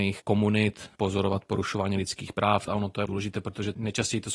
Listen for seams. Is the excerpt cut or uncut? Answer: uncut